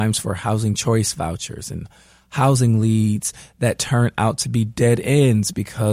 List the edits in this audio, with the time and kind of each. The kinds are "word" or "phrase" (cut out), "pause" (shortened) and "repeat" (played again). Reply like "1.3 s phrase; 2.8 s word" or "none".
none